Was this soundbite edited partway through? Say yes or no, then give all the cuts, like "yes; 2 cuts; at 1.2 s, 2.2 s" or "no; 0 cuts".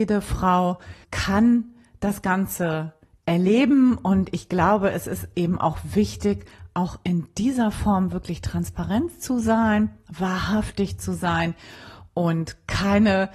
yes; 1 cut; at 1.0 s